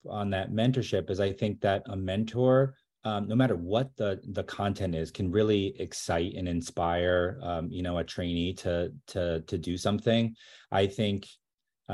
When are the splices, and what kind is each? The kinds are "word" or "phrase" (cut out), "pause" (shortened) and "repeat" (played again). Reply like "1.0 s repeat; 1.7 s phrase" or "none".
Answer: none